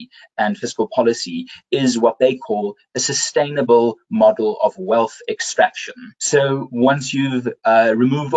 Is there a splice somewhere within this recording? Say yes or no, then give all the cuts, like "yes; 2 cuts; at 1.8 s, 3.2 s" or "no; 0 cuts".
yes; 1 cut; at 6.2 s